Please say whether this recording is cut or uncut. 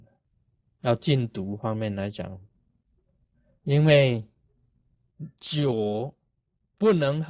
uncut